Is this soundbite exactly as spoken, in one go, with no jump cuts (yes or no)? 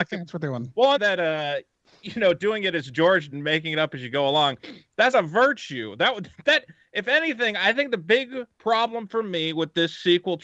no